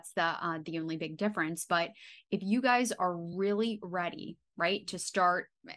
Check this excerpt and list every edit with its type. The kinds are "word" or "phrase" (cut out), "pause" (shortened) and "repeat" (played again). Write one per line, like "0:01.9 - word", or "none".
none